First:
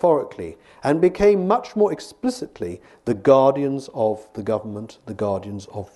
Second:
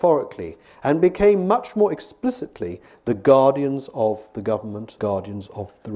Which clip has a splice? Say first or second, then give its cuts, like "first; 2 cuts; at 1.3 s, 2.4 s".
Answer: second; 1 cut; at 5.0 s